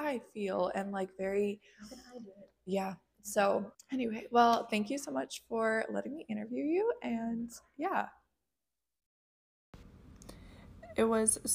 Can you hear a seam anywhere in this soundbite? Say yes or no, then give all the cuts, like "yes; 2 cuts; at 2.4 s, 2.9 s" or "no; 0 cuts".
yes; 1 cut; at 3.7 s